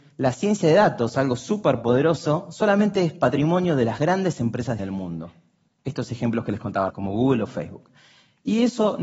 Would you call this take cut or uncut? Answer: cut